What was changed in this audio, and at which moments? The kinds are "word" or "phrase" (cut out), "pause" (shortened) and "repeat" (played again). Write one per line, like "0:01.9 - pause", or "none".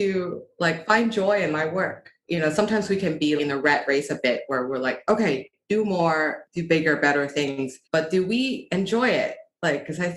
0:03.4 - word
0:07.8 - pause